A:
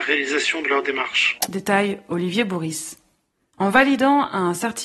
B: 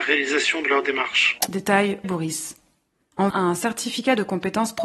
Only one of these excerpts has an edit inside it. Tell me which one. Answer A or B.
B